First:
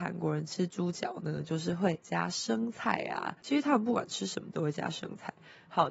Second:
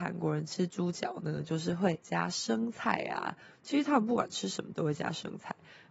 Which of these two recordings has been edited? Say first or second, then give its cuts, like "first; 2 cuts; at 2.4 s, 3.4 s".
first; 1 cut; at 3.4 s